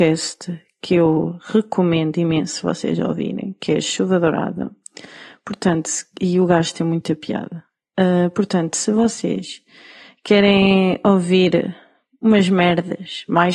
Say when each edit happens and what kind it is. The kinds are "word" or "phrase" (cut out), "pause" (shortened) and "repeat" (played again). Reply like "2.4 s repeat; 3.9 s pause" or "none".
none

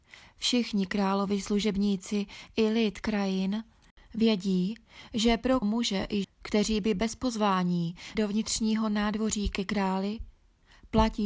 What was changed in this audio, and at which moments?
3.0 s word; 5.6 s word; 6.2 s word; 8.1 s word

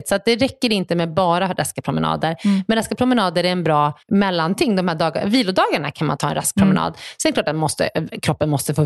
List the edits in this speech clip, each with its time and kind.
4.0 s pause

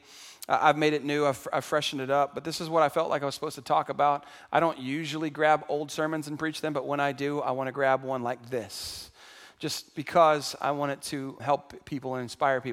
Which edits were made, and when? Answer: 9.9 s word; 11.4 s word

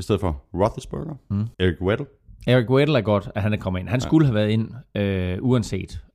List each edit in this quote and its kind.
1.5 s pause; 2.4 s pause

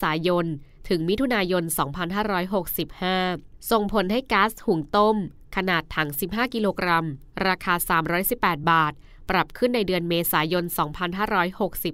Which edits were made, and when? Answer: none

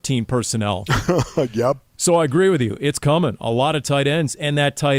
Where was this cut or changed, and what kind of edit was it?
none

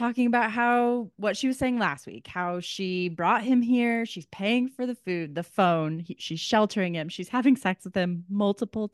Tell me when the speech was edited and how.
none

